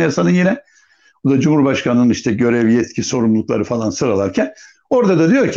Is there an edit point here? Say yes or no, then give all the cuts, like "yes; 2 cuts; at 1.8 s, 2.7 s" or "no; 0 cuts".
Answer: no; 0 cuts